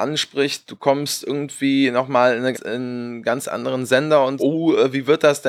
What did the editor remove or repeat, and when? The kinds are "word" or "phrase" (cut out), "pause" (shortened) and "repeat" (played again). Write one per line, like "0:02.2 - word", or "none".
0:02.5 - phrase
0:04.4 - word